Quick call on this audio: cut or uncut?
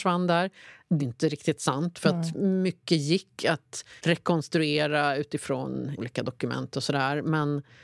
cut